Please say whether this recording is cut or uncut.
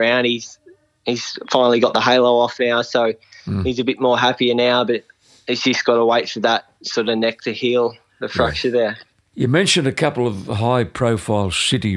cut